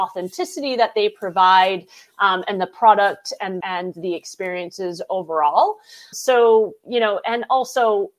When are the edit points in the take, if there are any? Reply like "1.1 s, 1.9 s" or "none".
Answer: 3.6 s, 6.1 s